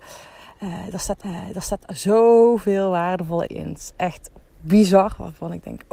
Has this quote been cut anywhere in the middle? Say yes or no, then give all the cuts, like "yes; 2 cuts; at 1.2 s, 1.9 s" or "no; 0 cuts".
yes; 2 cuts; at 1.2 s, 3.5 s